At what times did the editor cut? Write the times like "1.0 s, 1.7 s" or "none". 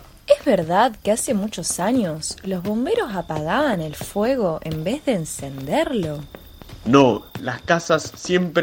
none

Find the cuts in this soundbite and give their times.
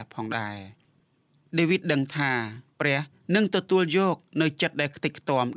2.7 s

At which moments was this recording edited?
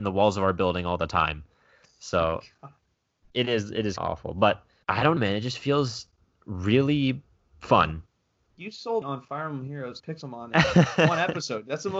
3.2 s, 4.0 s, 4.8 s, 5.2 s, 9.0 s, 10.0 s

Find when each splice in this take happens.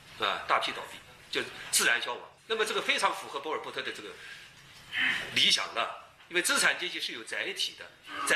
2.4 s

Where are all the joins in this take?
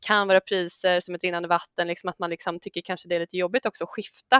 none

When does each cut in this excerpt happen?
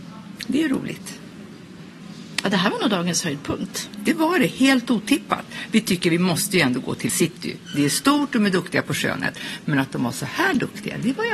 7.1 s

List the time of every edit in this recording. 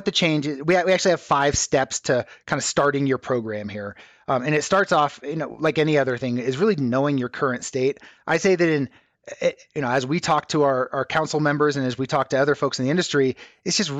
none

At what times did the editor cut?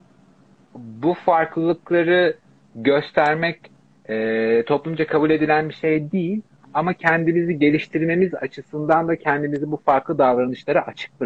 none

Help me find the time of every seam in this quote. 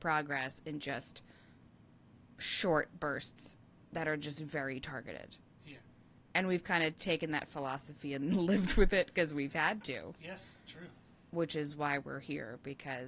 none

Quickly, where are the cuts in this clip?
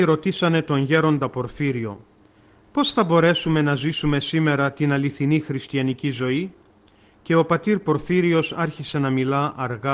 none

